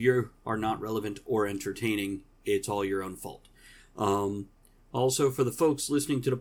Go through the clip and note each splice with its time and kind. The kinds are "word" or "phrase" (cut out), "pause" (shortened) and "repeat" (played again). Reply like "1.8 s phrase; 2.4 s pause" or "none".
none